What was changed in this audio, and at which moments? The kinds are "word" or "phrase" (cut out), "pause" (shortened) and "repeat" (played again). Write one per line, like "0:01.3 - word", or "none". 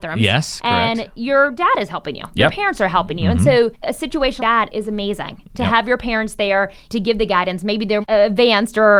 0:03.7 - word
0:04.4 - word
0:08.0 - word